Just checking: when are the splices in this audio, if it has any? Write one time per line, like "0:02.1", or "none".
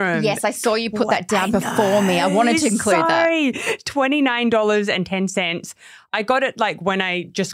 none